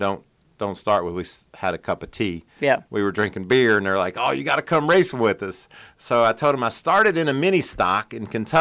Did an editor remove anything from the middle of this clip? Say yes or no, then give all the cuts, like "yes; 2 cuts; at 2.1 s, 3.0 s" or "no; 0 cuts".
no; 0 cuts